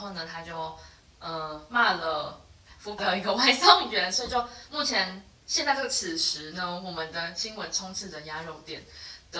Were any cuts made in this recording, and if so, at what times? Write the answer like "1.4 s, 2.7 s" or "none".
3.0 s